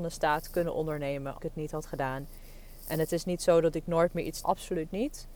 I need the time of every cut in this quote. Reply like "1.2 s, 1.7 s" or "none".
1.4 s, 4.4 s